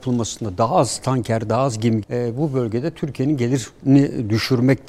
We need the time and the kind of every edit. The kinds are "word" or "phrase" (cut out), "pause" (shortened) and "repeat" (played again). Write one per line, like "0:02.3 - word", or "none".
0:02.0 - word